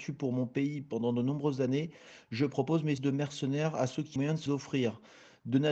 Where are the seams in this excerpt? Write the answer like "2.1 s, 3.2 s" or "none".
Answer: 3.0 s, 4.2 s, 4.5 s